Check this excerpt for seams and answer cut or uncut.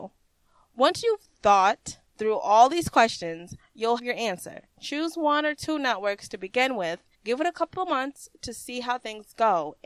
cut